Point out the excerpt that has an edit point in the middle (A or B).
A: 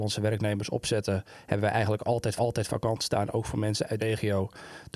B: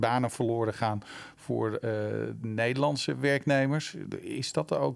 A